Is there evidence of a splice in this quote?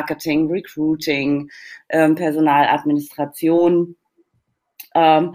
no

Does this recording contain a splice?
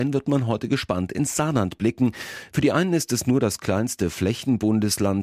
no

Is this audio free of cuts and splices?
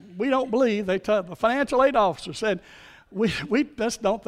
yes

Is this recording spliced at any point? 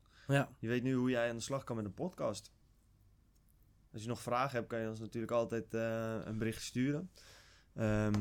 no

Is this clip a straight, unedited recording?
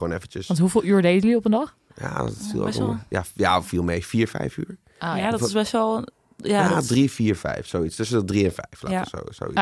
yes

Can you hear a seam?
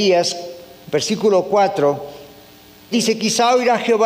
yes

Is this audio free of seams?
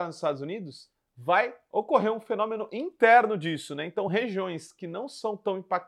yes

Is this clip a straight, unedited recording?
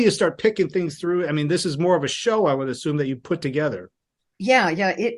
yes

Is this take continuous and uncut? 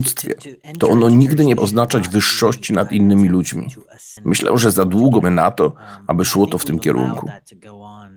no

